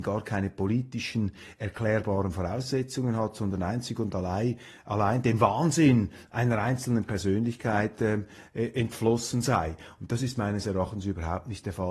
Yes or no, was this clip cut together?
no